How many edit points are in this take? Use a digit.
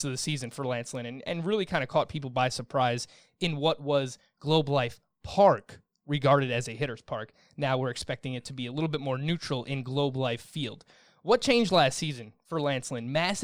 0